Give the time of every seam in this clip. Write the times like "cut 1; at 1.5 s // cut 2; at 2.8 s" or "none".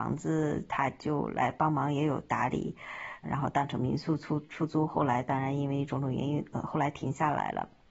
cut 1; at 3.2 s